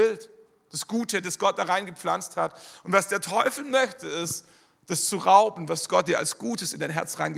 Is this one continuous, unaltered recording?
yes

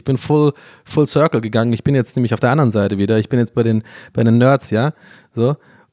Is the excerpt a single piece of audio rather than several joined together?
yes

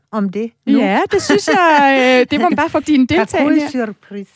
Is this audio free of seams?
no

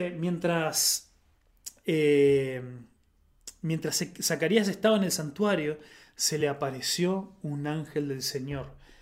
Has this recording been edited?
no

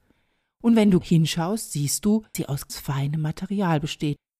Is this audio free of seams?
no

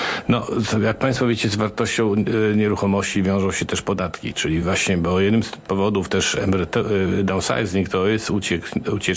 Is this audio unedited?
yes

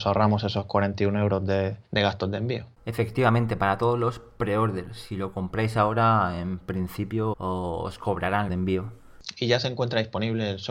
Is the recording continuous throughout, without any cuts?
no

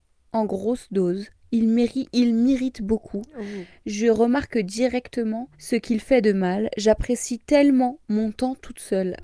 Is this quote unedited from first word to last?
no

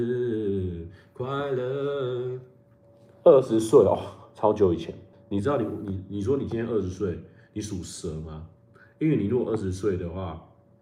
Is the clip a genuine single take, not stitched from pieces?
no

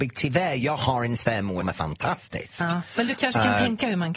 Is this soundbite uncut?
no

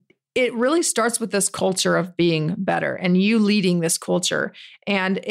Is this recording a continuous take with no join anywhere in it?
yes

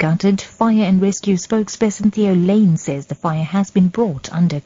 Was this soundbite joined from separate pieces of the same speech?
no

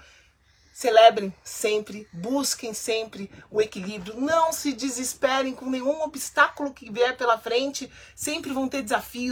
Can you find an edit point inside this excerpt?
no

